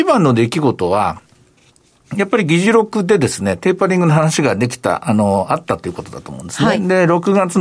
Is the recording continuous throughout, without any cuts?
yes; 0 cuts

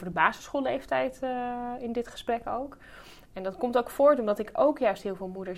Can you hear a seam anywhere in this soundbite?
no; 0 cuts

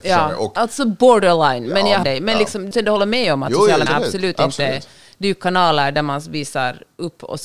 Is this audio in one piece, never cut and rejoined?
no; 3 cuts; at 2.0 s, 2.7 s, 3.9 s

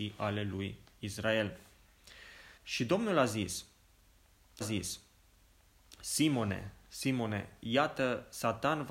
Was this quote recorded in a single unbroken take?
no; 2 cuts; at 2.6 s, 4.6 s

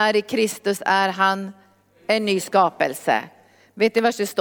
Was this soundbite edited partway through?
no; 0 cuts

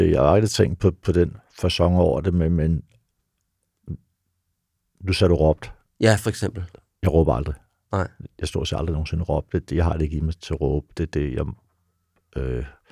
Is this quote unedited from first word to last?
yes; 0 cuts

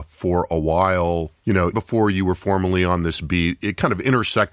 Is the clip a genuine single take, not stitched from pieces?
no; 2 cuts; at 1.4 s, 1.7 s

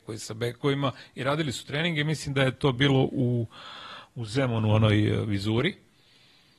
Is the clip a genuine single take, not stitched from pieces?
yes; 0 cuts

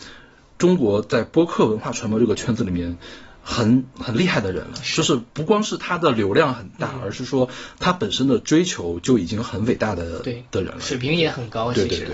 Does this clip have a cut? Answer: yes; 1 cut; at 5.3 s

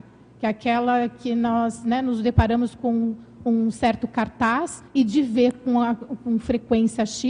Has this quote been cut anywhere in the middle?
yes; 1 cut; at 4.9 s

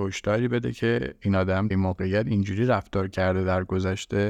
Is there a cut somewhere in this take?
yes; 1 cut; at 1.7 s

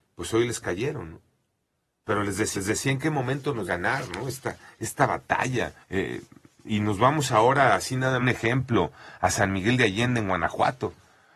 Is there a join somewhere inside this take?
yes; 4 cuts; at 2.5 s, 3.7 s, 5.8 s, 8.2 s

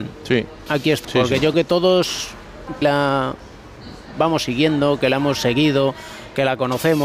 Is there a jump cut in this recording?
yes; 3 cuts; at 1.0 s, 1.5 s, 2.8 s

